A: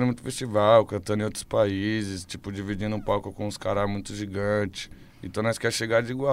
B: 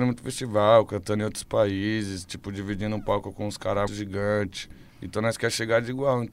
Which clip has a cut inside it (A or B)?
B